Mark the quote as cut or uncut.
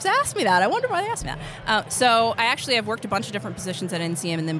uncut